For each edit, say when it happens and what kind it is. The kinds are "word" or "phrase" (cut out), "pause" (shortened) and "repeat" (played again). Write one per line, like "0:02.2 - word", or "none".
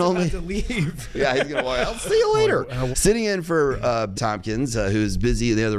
0:02.9 - word
0:04.1 - word